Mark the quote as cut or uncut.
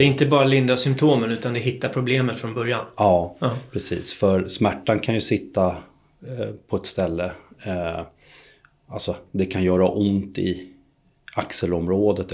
uncut